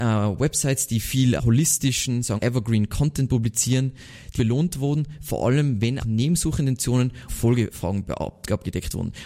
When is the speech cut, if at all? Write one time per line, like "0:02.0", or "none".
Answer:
0:01.4
0:02.4
0:04.4
0:06.0
0:07.3